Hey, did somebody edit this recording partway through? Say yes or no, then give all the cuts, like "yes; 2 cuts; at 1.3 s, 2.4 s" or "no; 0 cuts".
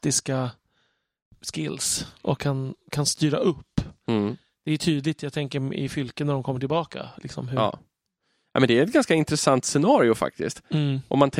no; 0 cuts